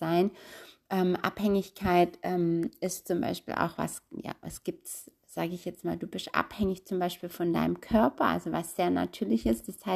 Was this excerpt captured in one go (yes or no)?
yes